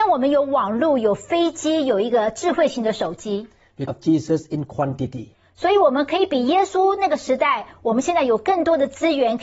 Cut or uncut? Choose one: cut